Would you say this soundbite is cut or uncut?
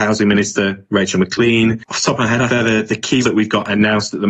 cut